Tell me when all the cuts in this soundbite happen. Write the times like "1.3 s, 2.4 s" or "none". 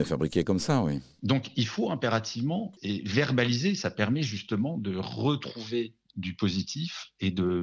2.8 s